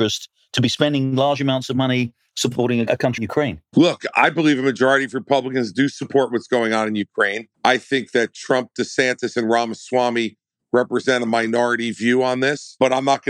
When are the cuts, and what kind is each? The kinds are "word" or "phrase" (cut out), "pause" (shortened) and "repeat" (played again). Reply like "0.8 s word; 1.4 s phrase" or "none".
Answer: 3.2 s word; 7.5 s pause